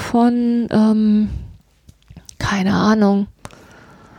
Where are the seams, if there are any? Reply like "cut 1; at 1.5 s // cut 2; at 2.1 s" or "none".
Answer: none